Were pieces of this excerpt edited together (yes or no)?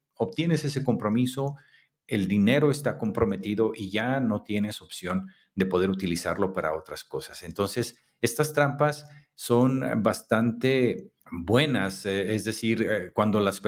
yes